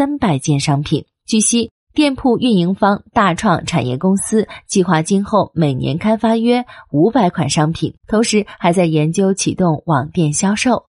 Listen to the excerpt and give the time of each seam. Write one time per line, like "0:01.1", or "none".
0:08.0